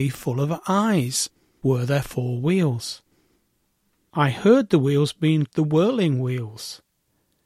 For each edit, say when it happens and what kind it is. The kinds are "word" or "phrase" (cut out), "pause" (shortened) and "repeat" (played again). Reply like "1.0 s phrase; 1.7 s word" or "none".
1.6 s word; 5.5 s word